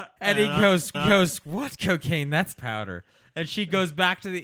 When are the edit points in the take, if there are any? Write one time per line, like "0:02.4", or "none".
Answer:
0:00.9
0:02.6